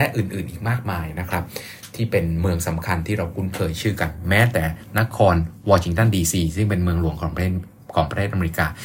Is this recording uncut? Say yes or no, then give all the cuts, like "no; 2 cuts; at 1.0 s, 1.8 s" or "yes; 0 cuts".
yes; 0 cuts